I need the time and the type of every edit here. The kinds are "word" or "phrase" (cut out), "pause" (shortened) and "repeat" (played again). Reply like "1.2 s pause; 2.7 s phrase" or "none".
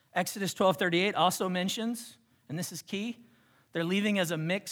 none